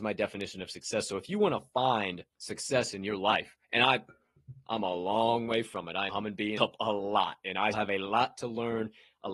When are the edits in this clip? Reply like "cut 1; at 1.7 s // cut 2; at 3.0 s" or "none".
cut 1; at 2.3 s // cut 2; at 3.6 s // cut 3; at 6.1 s // cut 4; at 6.6 s // cut 5; at 7.7 s